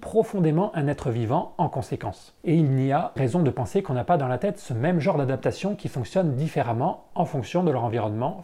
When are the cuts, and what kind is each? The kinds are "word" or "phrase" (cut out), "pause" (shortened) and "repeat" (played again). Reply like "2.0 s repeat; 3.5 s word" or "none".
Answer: 3.2 s word